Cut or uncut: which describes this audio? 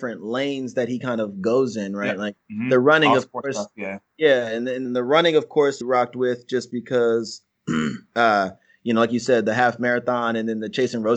cut